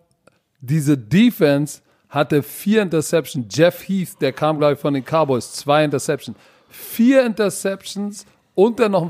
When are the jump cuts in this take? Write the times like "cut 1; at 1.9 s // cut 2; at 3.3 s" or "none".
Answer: none